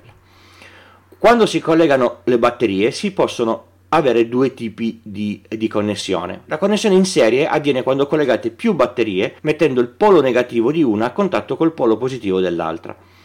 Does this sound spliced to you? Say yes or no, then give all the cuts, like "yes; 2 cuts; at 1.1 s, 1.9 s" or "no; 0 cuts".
yes; 1 cut; at 9.4 s